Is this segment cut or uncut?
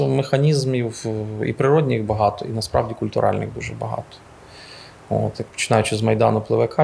uncut